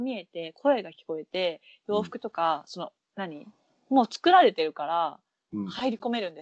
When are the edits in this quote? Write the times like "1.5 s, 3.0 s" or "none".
none